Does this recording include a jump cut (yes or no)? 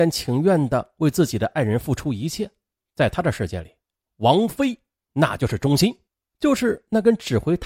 yes